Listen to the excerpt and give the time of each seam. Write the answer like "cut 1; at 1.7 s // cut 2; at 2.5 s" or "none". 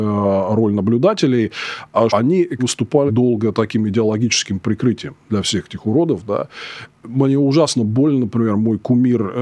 cut 1; at 2.1 s // cut 2; at 2.6 s // cut 3; at 3.1 s // cut 4; at 5.2 s